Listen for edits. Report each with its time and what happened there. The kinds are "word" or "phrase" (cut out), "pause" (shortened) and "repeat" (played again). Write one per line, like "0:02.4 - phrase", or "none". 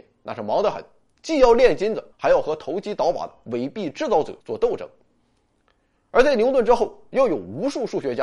0:02.1 - pause
0:04.4 - pause